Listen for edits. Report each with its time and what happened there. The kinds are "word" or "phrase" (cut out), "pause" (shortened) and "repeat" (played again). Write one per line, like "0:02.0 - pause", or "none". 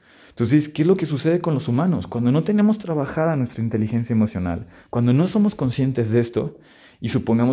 none